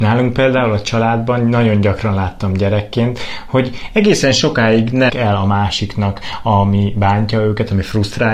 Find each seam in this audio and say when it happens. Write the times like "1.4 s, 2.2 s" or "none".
5.1 s